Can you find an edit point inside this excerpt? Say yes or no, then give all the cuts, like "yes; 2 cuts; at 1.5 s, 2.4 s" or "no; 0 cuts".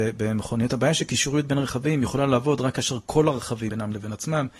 yes; 1 cut; at 3.7 s